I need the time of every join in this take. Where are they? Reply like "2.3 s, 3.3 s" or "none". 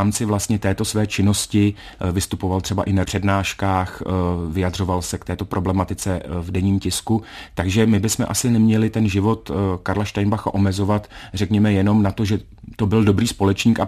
3.0 s